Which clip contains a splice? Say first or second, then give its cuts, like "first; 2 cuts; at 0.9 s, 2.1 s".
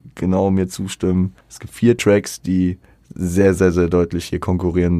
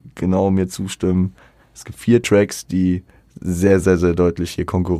first; 1 cut; at 1.4 s